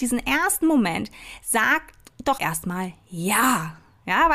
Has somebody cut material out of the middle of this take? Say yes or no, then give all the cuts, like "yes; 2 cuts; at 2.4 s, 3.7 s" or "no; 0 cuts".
yes; 1 cut; at 2.4 s